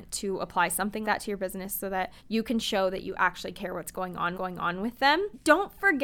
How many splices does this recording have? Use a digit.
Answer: 3